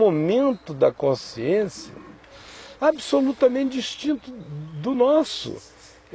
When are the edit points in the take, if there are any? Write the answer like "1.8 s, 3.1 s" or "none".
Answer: none